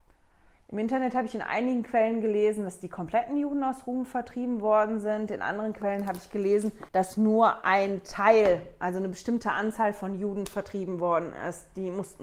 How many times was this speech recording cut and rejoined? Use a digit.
1